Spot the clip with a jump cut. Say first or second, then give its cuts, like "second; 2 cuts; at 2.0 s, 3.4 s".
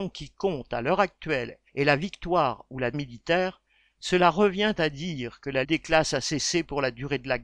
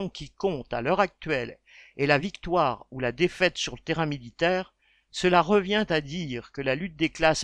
first; 3 cuts; at 1.7 s, 2.9 s, 5.6 s